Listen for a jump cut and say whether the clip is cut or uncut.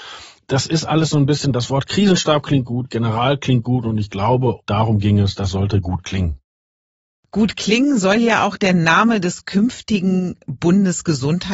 cut